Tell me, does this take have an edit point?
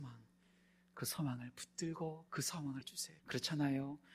yes; 3 cuts; at 2.3 s, 2.8 s, 3.2 s

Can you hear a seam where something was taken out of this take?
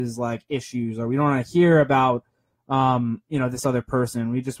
no; 0 cuts

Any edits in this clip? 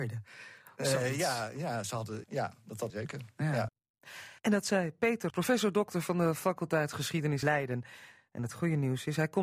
yes; 5 cuts; at 2.2 s, 2.9 s, 4.4 s, 5.3 s, 7.4 s

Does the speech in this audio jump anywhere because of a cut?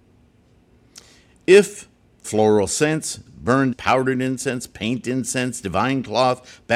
yes; 3 cuts; at 2.2 s, 3.3 s, 3.7 s

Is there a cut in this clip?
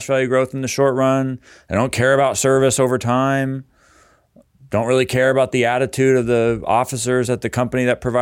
no; 0 cuts

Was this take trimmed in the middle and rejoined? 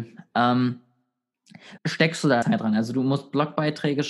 yes; 2 cuts; at 1.8 s, 2.4 s

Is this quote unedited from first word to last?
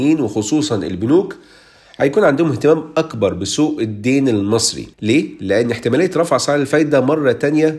no; 1 cut; at 4.9 s

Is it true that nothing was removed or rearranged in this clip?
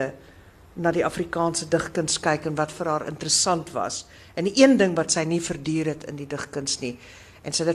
yes; 0 cuts

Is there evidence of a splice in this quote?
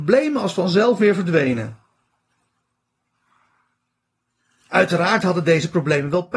no; 0 cuts

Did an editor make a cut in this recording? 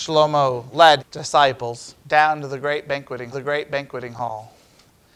yes; 3 cuts; at 1.0 s, 2.0 s, 3.3 s

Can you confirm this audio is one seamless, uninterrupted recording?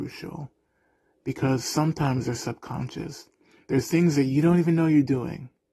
yes; 0 cuts

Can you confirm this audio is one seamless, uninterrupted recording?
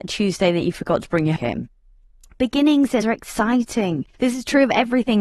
no; 3 cuts; at 1.4 s, 3.0 s, 4.1 s

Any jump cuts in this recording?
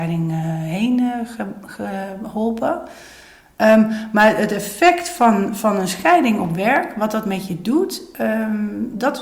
no; 0 cuts

